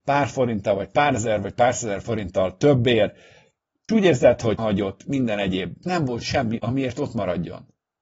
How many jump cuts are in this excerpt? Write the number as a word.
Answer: four